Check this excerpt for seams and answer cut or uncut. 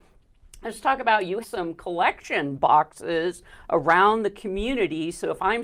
cut